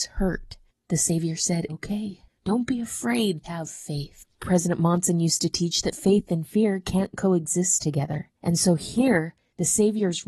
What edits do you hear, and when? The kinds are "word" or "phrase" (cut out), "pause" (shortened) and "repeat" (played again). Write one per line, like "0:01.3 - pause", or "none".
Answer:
0:01.7 - phrase
0:03.4 - word
0:08.3 - pause